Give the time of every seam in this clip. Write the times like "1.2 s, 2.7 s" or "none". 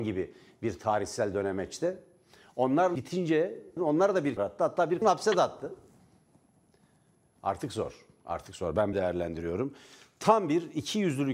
2.9 s, 3.8 s, 4.4 s, 5.0 s, 8.9 s